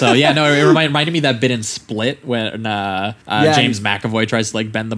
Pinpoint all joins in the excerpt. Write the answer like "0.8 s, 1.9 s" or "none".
3.2 s